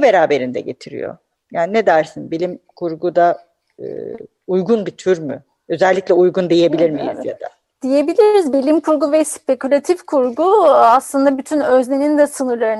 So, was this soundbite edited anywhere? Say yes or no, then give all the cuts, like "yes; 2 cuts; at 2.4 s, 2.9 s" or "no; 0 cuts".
no; 0 cuts